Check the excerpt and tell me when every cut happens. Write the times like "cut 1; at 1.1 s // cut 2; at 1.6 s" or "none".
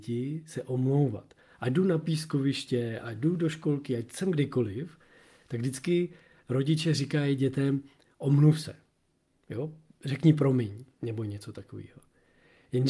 none